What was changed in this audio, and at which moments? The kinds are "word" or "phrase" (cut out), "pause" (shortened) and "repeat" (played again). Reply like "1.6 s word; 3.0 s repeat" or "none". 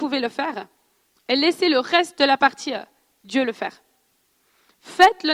none